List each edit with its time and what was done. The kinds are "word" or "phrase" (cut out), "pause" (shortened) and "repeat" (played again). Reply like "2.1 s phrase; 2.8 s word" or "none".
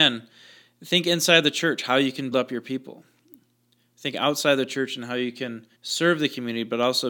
2.3 s word; 5.7 s pause